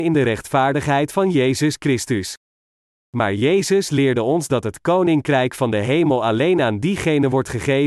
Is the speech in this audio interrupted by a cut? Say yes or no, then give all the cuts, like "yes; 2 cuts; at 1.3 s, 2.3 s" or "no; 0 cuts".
no; 0 cuts